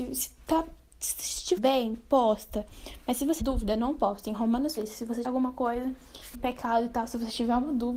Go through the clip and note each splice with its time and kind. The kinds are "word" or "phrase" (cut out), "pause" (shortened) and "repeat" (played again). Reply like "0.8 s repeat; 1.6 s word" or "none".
1.6 s word; 3.4 s word; 4.8 s word; 5.2 s word; 6.3 s word